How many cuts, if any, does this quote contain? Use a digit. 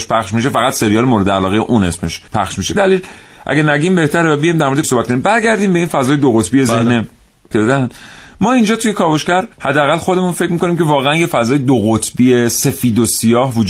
5